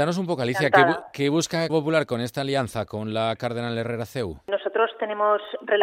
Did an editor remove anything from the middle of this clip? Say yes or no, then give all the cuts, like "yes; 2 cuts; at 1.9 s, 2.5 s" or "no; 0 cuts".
yes; 1 cut; at 1.7 s